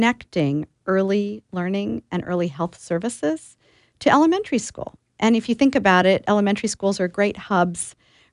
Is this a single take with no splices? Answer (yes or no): yes